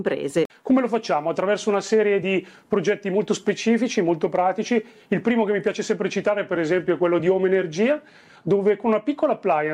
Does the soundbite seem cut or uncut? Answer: uncut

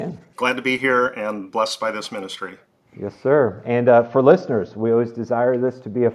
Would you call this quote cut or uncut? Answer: uncut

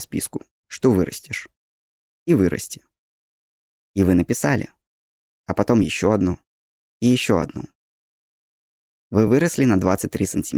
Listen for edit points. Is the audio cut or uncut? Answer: uncut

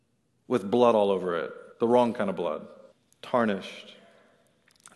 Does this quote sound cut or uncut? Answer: cut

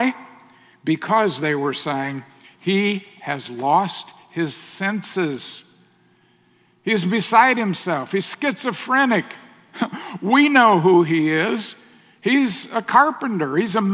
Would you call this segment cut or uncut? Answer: uncut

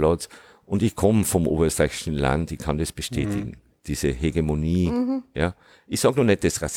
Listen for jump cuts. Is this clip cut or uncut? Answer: uncut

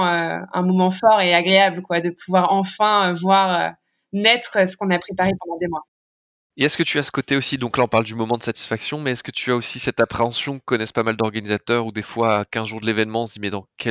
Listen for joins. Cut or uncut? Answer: uncut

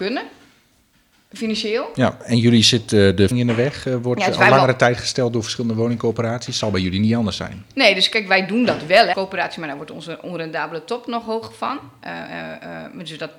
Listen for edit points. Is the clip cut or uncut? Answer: cut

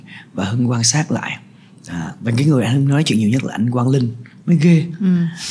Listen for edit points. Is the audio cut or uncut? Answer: uncut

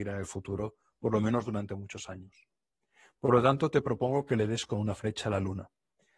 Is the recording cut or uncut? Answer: uncut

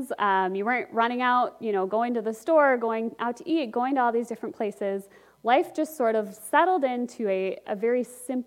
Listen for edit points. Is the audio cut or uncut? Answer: uncut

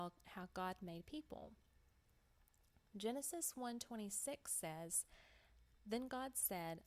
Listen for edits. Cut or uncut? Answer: uncut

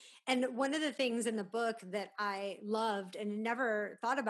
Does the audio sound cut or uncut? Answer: uncut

